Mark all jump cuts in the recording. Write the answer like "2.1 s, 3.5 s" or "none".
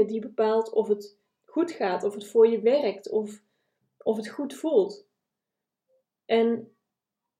none